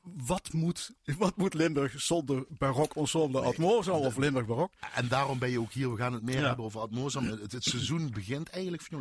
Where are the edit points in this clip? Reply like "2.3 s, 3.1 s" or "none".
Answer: 0.9 s